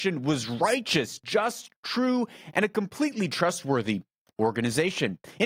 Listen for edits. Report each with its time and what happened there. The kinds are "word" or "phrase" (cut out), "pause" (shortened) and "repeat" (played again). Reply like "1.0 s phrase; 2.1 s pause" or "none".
none